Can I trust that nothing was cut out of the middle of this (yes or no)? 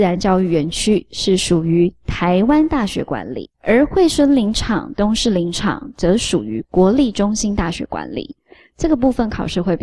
no